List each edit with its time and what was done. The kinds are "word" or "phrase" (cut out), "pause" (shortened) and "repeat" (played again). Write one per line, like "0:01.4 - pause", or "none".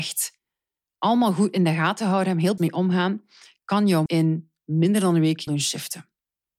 0:02.6 - word
0:04.1 - word
0:05.5 - word